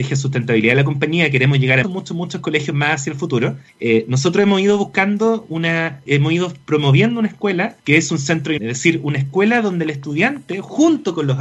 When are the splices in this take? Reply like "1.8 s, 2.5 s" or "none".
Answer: 1.8 s, 3.7 s, 6.1 s, 7.8 s, 8.6 s